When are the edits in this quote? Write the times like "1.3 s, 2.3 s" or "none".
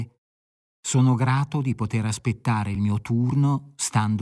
none